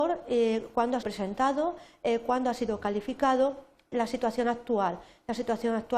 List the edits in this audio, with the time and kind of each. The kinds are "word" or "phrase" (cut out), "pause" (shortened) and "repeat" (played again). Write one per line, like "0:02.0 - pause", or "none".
0:01.0 - word
0:03.9 - word